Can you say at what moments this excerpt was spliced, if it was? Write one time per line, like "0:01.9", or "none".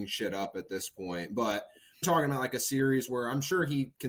0:02.0